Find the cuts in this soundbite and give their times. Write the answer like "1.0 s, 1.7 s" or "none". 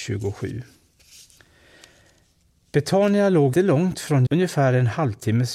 3.5 s, 4.3 s